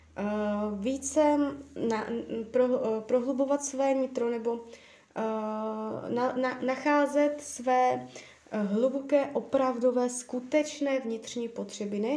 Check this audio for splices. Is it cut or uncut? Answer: uncut